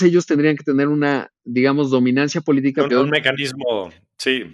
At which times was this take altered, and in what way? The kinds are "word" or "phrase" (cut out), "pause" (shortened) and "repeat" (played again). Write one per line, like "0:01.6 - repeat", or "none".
0:02.9 - word